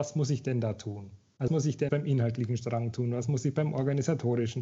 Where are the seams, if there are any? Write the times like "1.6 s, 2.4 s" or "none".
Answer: 1.5 s, 1.9 s

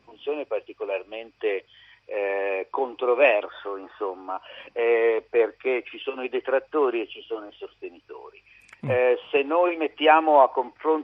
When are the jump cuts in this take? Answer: none

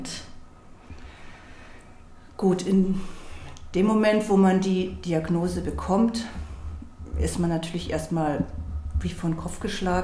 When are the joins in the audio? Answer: none

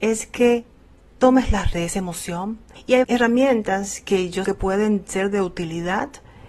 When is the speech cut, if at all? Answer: 1.7 s, 3.0 s, 4.4 s

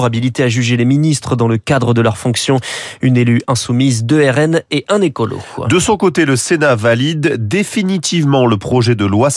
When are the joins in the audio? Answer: none

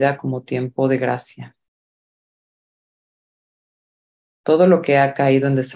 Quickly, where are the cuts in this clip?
none

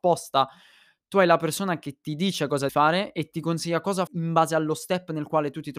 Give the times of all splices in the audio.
2.7 s, 4.1 s

